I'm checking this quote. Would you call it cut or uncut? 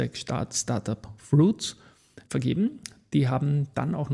cut